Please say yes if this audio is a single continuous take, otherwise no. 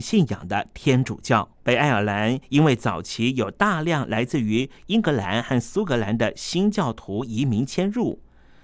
no